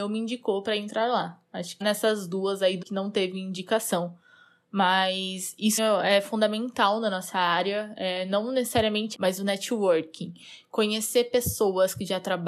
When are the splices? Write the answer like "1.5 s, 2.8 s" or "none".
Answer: 1.8 s, 2.8 s, 5.8 s, 9.1 s